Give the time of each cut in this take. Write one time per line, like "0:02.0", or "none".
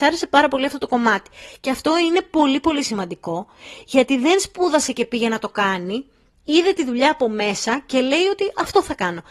none